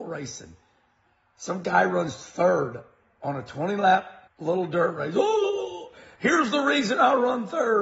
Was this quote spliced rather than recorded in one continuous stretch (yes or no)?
yes